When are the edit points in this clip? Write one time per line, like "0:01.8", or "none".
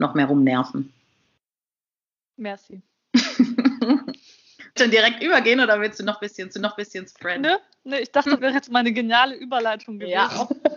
0:04.8
0:06.5
0:08.4